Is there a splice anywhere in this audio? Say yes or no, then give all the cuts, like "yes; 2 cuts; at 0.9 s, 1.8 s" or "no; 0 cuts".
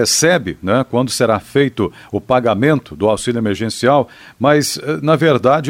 no; 0 cuts